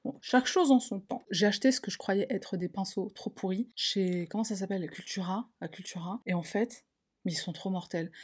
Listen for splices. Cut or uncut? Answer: uncut